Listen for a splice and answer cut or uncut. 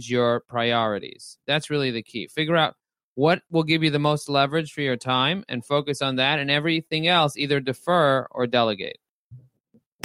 uncut